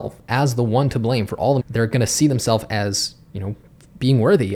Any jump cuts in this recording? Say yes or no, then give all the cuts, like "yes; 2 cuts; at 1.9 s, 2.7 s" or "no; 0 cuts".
yes; 1 cut; at 1.6 s